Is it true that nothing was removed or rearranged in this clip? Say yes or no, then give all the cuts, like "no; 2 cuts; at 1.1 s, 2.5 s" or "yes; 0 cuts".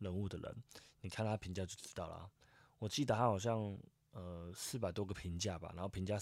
yes; 0 cuts